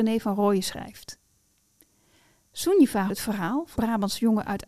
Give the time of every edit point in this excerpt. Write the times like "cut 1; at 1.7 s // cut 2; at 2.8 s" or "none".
cut 1; at 3.1 s // cut 2; at 3.8 s